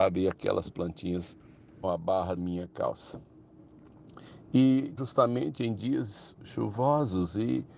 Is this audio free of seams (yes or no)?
no